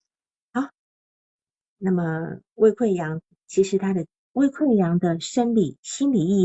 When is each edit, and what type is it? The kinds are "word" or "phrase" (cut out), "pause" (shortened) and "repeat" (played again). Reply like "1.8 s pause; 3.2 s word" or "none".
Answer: none